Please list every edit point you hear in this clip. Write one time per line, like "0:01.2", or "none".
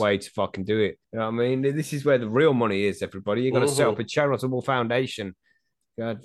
0:01.0